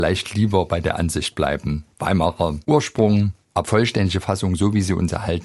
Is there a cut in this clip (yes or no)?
yes